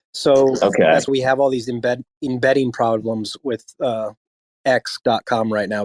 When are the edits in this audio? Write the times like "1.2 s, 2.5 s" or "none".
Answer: 1.1 s